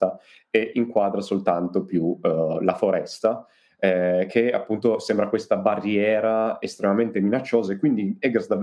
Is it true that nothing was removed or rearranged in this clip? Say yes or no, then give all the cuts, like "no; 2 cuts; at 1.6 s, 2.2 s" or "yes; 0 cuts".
yes; 0 cuts